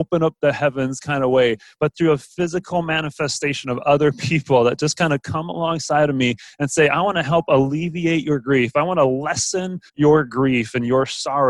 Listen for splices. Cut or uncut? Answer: cut